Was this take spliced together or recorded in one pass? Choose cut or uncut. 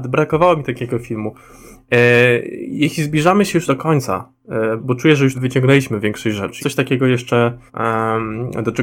cut